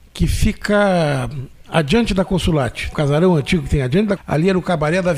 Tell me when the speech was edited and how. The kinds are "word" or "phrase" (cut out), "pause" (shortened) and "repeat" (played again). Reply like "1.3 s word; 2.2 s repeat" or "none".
1.6 s pause; 2.9 s word; 4.2 s word